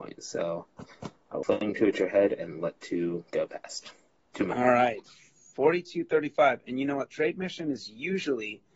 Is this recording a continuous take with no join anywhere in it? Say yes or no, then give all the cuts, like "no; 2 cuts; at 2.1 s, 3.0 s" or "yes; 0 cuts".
yes; 0 cuts